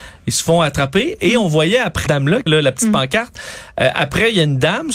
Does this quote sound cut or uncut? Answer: cut